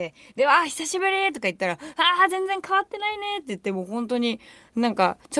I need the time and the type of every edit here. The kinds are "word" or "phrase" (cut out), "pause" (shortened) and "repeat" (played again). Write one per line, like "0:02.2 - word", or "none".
none

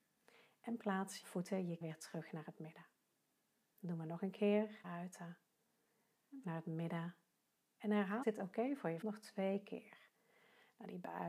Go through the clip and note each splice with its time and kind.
0:01.2 - word
0:01.8 - word
0:04.8 - word
0:06.4 - word
0:08.2 - word
0:09.0 - word

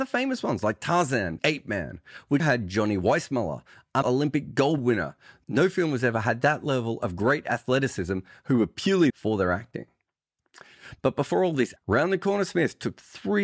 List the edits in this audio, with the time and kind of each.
0:01.4 - word
0:02.4 - word
0:04.0 - word
0:04.8 - word
0:09.1 - word
0:11.8 - phrase

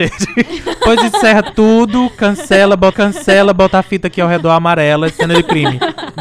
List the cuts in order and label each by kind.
0:02.9 - repeat

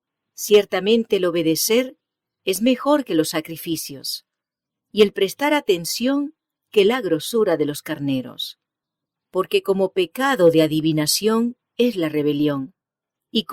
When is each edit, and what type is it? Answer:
none

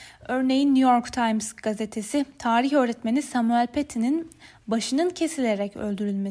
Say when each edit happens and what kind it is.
none

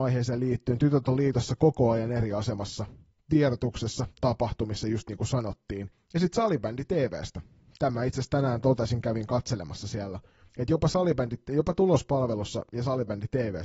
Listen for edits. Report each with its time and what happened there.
none

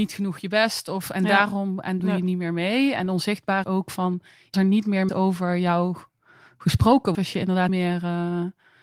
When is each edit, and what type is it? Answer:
0:02.0 - word
0:03.6 - word
0:04.5 - word
0:05.1 - word
0:07.1 - word
0:07.7 - word

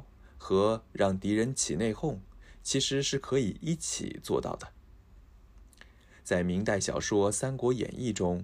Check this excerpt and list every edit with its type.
none

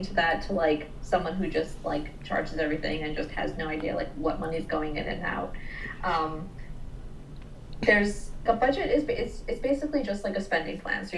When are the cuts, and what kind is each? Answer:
0:08.5 - word

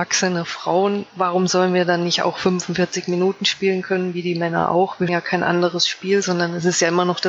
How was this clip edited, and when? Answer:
0:05.1 - word

